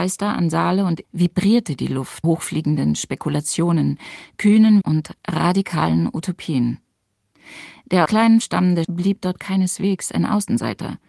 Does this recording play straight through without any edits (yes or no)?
no